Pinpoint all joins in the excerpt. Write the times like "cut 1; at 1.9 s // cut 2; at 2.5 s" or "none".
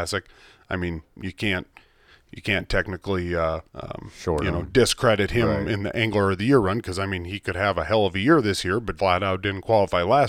cut 1; at 3.7 s // cut 2; at 9.0 s